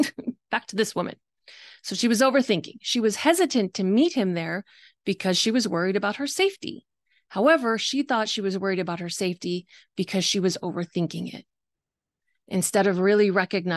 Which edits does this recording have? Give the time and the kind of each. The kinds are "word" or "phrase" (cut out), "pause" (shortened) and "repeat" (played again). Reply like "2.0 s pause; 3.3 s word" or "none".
none